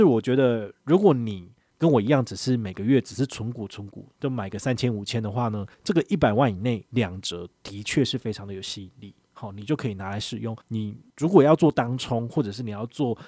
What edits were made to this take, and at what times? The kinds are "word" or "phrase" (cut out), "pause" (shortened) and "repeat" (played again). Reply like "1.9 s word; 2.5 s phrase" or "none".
4.2 s pause; 5.7 s pause; 10.6 s pause